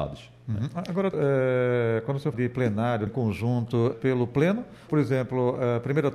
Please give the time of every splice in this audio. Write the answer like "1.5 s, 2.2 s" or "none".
1.1 s, 2.3 s, 3.1 s, 3.9 s, 4.9 s